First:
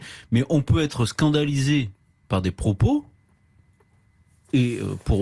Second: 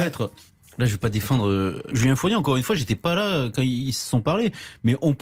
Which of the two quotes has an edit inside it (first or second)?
second